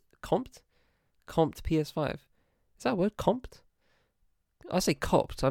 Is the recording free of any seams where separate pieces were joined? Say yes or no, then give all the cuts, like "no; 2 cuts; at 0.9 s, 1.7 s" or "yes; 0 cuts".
yes; 0 cuts